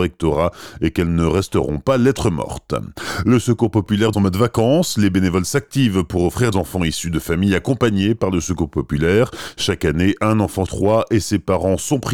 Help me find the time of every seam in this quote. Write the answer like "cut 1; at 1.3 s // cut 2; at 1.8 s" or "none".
cut 1; at 4.1 s // cut 2; at 6.5 s // cut 3; at 10.7 s